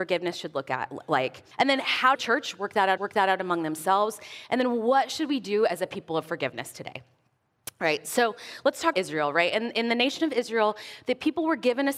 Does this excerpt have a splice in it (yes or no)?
yes